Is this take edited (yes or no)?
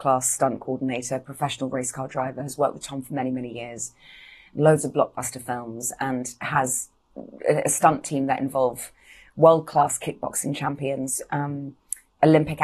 no